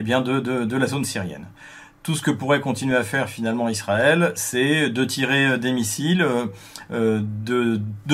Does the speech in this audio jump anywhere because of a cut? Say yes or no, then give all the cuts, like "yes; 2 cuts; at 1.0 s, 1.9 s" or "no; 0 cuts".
no; 0 cuts